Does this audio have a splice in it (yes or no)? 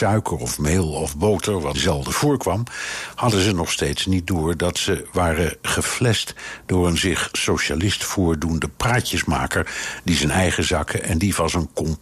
yes